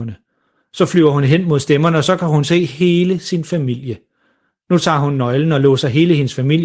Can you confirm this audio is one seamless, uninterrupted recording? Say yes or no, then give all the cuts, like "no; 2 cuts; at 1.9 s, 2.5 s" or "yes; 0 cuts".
yes; 0 cuts